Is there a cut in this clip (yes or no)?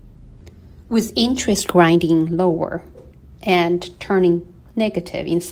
yes